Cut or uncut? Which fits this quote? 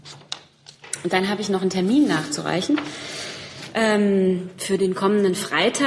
uncut